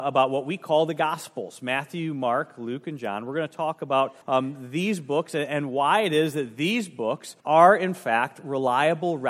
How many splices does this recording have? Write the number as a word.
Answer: two